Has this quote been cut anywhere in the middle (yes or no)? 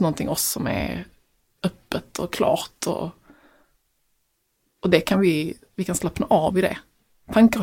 no